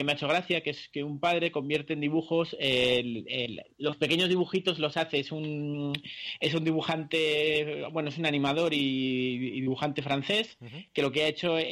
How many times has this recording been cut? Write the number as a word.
one